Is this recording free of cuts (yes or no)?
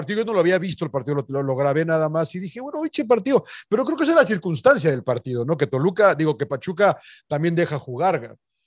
yes